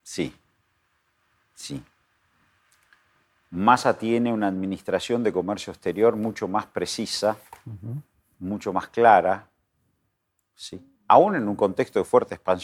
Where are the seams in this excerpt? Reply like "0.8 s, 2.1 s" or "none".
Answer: none